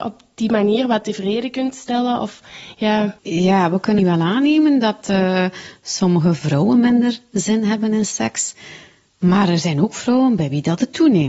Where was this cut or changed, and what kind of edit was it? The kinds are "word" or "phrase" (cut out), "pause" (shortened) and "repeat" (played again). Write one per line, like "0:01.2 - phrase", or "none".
0:04.0 - word